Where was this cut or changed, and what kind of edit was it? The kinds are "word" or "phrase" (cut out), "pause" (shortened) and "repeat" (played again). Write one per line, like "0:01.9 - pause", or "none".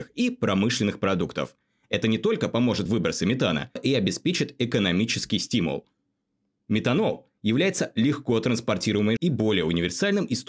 0:02.9 - word
0:03.8 - word
0:09.2 - word